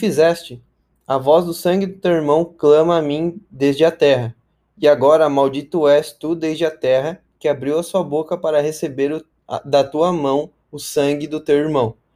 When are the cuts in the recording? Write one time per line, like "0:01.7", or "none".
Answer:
none